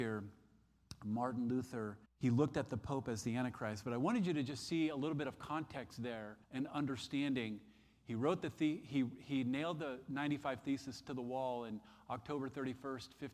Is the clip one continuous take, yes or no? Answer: no